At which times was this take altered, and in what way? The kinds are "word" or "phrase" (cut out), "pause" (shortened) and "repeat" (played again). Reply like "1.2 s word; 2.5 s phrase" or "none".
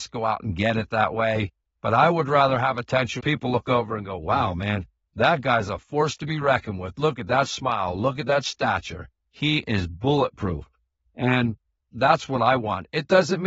3.2 s word